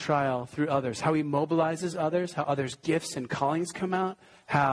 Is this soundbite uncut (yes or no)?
yes